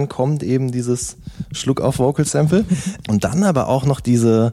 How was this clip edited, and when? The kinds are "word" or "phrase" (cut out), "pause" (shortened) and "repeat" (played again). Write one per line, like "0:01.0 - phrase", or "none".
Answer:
0:03.0 - word